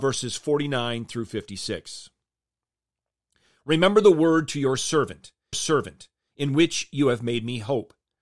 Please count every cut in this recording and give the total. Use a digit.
1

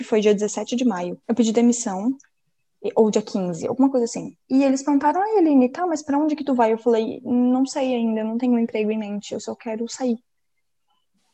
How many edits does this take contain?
2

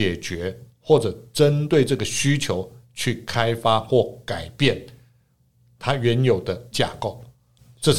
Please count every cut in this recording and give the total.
1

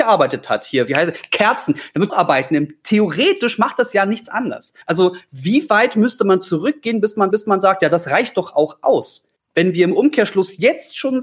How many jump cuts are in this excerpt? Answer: 3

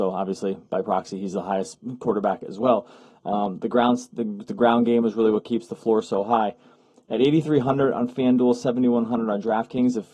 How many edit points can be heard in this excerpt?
0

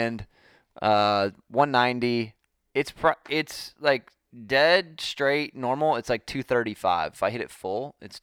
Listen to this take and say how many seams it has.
0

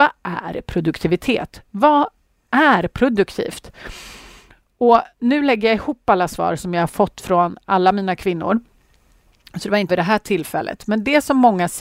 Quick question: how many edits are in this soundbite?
2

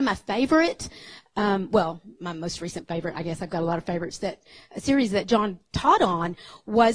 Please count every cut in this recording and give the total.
0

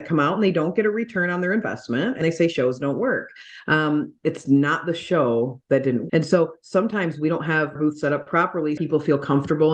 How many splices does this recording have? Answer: 4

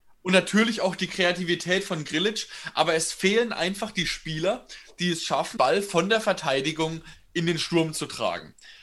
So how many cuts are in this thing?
1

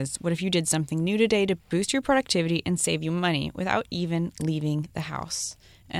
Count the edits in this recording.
0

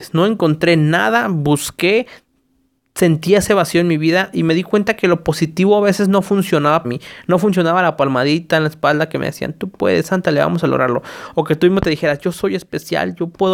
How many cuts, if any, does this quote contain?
1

